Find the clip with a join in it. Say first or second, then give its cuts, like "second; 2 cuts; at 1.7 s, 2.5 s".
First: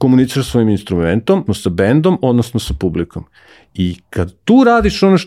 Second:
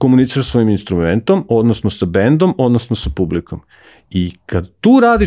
first; 1 cut; at 1.5 s